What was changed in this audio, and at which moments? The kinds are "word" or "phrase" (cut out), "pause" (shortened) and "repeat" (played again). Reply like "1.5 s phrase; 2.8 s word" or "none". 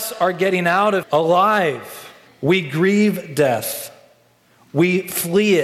1.0 s word; 2.3 s pause